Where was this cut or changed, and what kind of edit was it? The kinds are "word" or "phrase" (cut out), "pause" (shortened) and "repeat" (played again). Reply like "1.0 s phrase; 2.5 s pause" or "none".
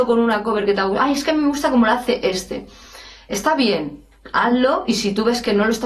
none

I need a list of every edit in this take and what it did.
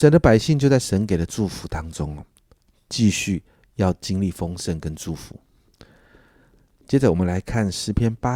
none

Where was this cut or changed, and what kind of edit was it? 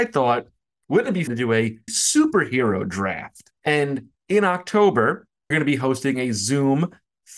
1.3 s word; 1.9 s word; 3.6 s pause; 5.5 s word

